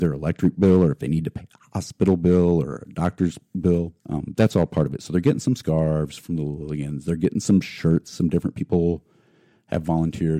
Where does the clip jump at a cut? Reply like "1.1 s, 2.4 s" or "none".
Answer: 4.0 s